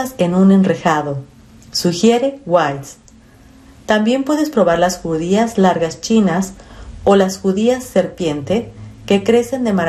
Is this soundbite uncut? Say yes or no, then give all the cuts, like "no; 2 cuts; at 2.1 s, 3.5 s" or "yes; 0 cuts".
yes; 0 cuts